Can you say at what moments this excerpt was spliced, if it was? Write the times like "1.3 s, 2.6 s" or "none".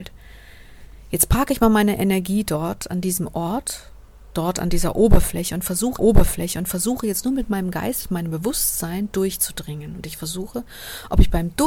6.0 s